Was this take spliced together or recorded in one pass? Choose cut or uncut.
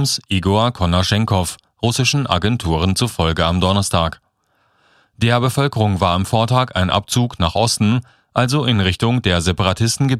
uncut